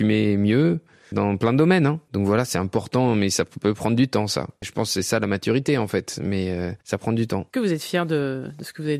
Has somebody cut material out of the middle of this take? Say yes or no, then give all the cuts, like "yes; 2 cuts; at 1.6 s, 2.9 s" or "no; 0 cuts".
no; 0 cuts